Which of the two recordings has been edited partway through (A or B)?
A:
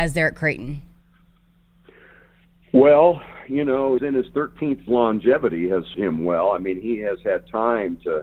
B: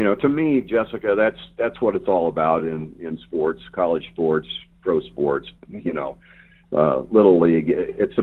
A